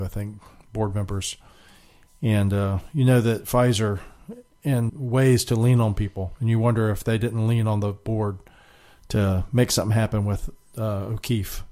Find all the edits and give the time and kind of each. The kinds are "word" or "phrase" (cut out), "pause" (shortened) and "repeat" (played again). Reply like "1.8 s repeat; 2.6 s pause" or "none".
4.9 s phrase